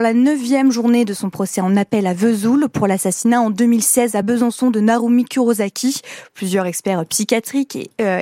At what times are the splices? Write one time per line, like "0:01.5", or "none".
none